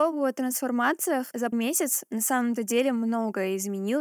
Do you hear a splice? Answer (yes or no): yes